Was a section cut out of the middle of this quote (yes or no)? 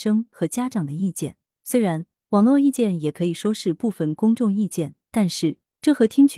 no